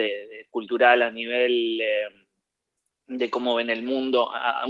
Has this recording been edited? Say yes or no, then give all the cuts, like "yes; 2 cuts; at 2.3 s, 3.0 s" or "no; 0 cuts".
no; 0 cuts